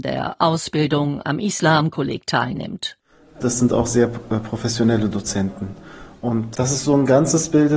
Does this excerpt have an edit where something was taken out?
no; 0 cuts

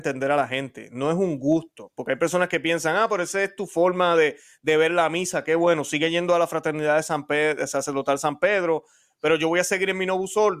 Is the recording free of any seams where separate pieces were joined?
yes; 0 cuts

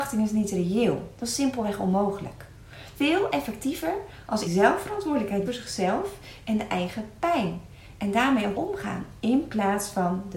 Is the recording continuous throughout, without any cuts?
no; 4 cuts; at 3.0 s, 4.4 s, 5.5 s, 8.5 s

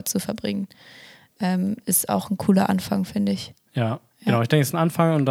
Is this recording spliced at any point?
no; 0 cuts

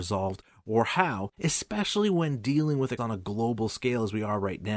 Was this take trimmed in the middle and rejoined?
yes; 2 cuts; at 1.3 s, 3.0 s

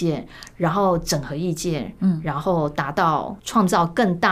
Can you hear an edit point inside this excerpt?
yes; 1 cut; at 3.4 s

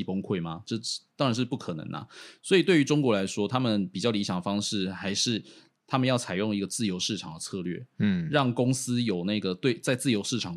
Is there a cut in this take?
no; 0 cuts

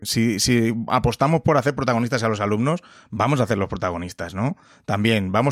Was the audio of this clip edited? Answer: no; 0 cuts

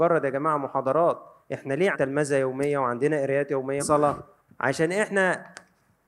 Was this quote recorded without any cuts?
no; 4 cuts; at 1.4 s, 1.9 s, 3.8 s, 4.4 s

